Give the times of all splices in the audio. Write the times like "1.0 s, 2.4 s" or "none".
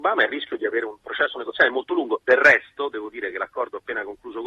none